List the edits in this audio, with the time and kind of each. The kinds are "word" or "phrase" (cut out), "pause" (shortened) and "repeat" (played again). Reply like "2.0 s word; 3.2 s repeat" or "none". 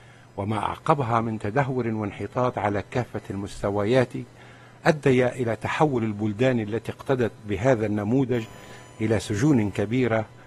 none